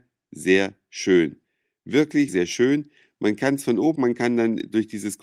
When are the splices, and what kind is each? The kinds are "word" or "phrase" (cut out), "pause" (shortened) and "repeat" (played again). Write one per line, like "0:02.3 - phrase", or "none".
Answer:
0:02.3 - word
0:03.9 - word

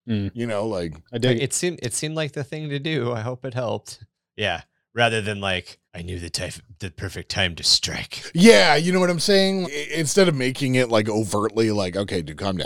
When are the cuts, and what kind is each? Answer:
0:05.9 - pause
0:09.6 - word

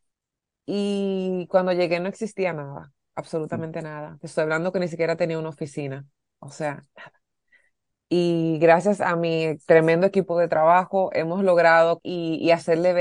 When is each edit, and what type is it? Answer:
0:12.0 - word

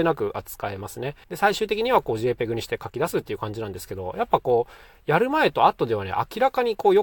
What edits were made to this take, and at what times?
0:01.2 - pause

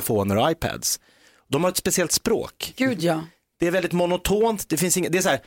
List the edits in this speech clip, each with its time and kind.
none

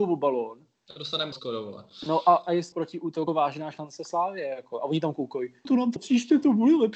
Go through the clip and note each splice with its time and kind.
0:01.3 - word
0:02.7 - word
0:03.3 - word
0:05.6 - word
0:06.0 - word

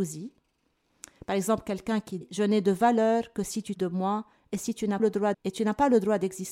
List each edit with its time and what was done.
0:02.2 - word
0:03.7 - word
0:05.0 - word
0:05.3 - word

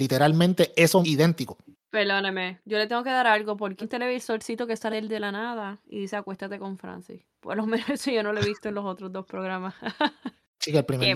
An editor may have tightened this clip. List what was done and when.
0:01.0 - word
0:03.8 - word
0:04.9 - word

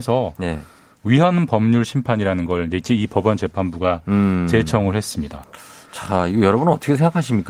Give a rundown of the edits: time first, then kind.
none

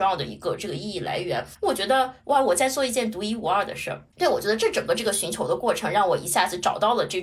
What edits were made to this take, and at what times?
0:04.1 - pause

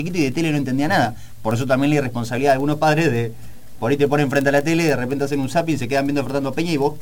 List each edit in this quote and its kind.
none

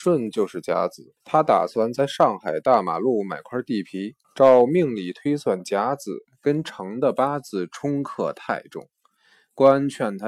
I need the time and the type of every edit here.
0:01.2 - pause
0:04.2 - pause

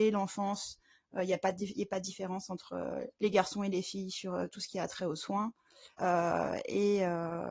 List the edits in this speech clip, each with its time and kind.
0:03.1 - pause
0:05.9 - pause

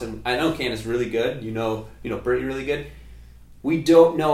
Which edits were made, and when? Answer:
none

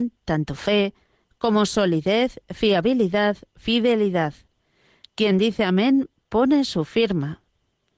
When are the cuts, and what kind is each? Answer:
none

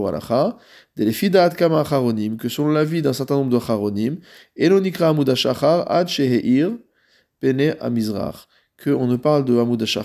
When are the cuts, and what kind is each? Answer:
none

